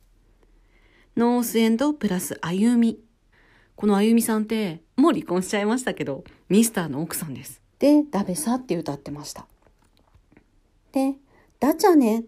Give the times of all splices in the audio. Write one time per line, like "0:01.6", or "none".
0:03.3
0:04.9
0:07.7